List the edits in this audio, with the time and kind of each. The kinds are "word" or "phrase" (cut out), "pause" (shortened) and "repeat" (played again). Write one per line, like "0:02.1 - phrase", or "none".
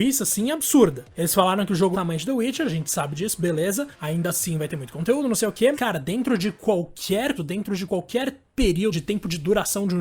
0:01.9 - phrase
0:03.9 - pause
0:05.7 - word
0:07.4 - word
0:08.9 - word

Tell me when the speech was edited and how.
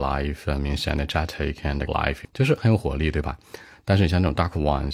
0:01.9 - word
0:02.2 - word

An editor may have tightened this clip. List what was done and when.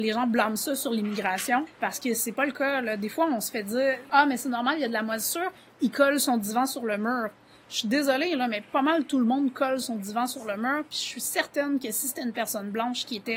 none

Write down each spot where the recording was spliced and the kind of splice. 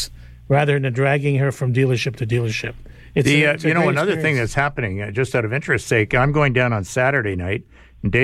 none

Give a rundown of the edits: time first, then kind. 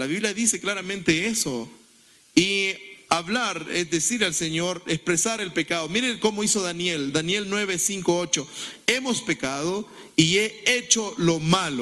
none

